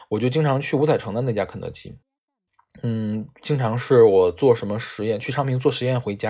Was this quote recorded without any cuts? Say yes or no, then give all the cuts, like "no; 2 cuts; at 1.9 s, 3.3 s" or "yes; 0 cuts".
yes; 0 cuts